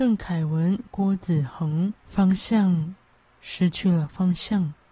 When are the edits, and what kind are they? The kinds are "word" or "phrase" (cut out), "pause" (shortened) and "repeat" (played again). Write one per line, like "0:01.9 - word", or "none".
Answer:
0:02.0 - pause